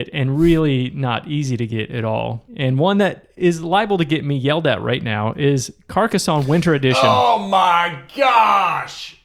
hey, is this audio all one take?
no; 1 cut; at 2.5 s

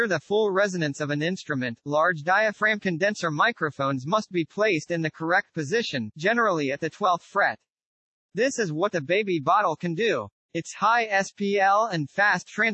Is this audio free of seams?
yes; 0 cuts

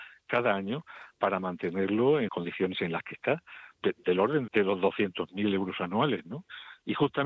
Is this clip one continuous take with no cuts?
no; 2 cuts; at 2.3 s, 4.5 s

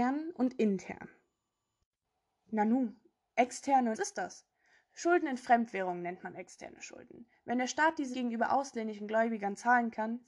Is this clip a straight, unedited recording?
no; 2 cuts; at 3.9 s, 8.1 s

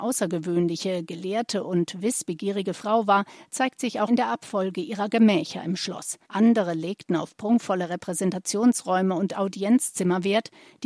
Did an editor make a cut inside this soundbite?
yes; 2 cuts; at 4.1 s, 6.2 s

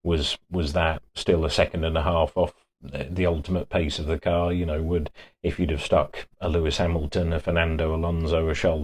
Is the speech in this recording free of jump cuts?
yes; 0 cuts

